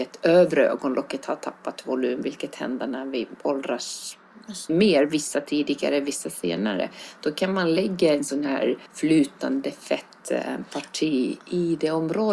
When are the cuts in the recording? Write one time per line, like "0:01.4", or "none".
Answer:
0:04.7
0:08.9